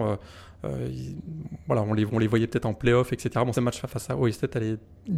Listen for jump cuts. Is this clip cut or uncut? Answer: cut